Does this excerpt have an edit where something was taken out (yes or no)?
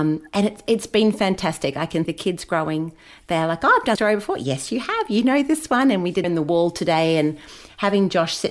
yes